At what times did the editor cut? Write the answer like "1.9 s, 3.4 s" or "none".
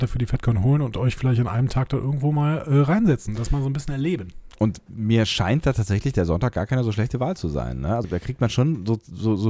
8.0 s